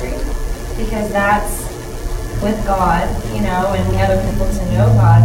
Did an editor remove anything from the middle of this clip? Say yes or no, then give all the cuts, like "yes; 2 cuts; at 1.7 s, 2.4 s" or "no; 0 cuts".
yes; 2 cuts; at 2.4 s, 3.9 s